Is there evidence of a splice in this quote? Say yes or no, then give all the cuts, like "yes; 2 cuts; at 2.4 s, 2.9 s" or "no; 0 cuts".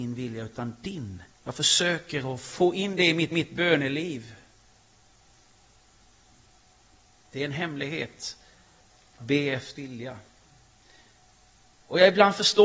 yes; 4 cuts; at 1.3 s, 3.3 s, 9.2 s, 9.7 s